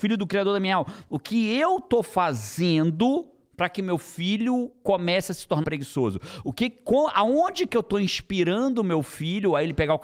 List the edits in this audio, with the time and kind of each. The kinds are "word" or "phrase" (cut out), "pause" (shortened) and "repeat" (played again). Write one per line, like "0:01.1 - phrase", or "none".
0:05.6 - word